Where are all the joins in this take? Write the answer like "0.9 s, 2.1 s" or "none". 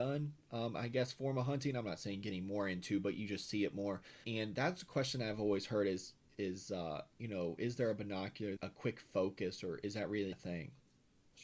4.2 s, 8.6 s, 10.3 s